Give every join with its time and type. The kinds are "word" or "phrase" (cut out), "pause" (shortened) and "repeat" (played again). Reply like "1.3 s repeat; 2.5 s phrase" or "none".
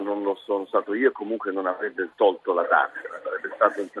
2.1 s pause